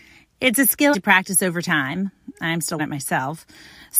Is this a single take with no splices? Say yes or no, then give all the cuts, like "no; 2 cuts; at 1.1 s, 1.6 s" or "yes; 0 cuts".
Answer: no; 2 cuts; at 0.9 s, 2.8 s